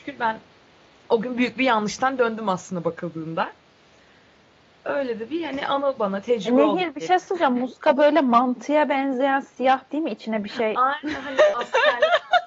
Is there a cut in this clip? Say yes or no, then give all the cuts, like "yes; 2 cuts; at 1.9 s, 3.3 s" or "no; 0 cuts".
yes; 1 cut; at 9.9 s